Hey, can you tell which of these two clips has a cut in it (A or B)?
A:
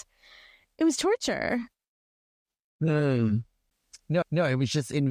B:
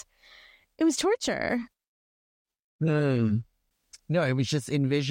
A